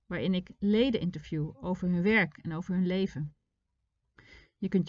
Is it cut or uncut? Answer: uncut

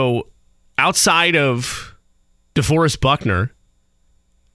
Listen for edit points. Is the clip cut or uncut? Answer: uncut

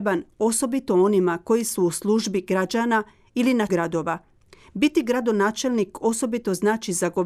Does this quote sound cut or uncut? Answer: cut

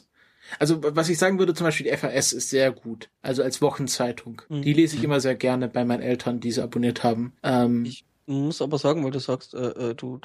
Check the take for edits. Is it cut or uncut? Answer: cut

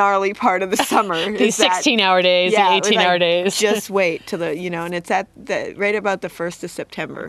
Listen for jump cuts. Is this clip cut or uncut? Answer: uncut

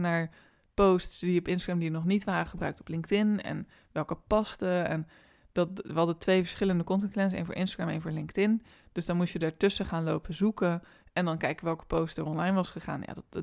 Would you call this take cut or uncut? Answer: uncut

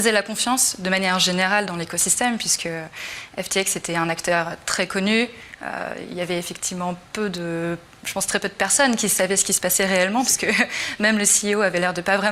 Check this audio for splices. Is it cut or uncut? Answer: uncut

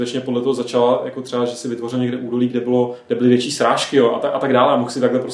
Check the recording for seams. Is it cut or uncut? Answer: uncut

